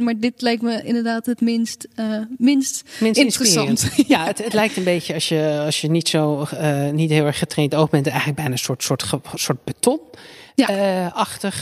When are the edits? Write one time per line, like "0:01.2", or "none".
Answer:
none